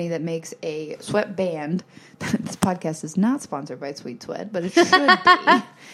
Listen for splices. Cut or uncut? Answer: uncut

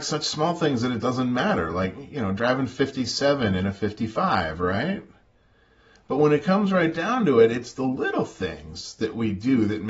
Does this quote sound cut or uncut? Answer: uncut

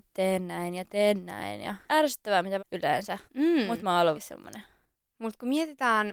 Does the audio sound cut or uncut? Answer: cut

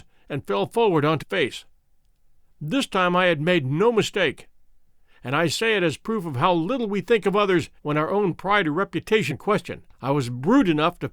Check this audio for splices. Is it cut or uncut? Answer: cut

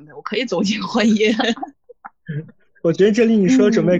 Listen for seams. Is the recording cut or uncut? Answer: uncut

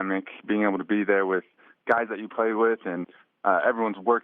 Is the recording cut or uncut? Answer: uncut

